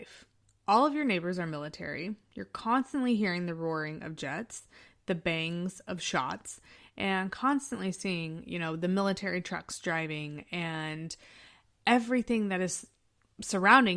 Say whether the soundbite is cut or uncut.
uncut